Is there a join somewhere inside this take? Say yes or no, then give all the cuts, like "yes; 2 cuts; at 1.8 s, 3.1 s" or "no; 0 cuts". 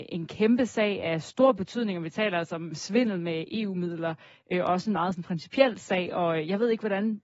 no; 0 cuts